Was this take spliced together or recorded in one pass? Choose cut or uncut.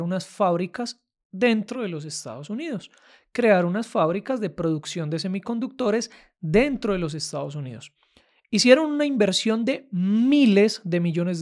uncut